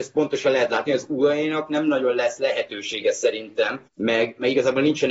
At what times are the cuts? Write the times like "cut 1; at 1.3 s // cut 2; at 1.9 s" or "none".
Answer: cut 1; at 3.9 s

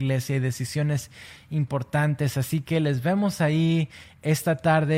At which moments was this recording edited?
none

